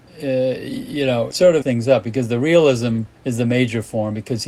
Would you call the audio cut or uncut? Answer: cut